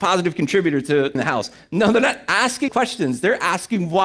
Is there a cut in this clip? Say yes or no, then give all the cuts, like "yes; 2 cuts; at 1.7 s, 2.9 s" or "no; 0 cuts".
yes; 2 cuts; at 1.1 s, 2.7 s